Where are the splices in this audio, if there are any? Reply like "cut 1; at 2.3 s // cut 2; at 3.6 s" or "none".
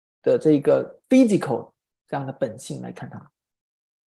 cut 1; at 1.0 s